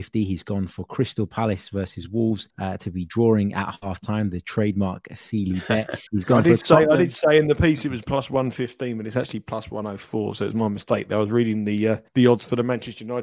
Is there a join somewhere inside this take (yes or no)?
yes